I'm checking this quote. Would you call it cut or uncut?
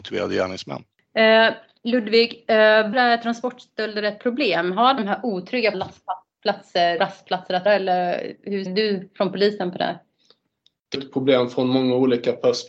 cut